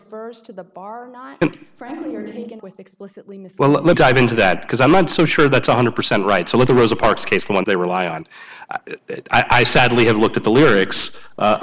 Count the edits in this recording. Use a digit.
4